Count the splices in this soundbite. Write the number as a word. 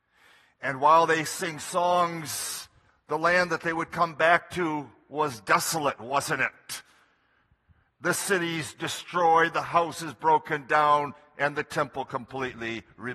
zero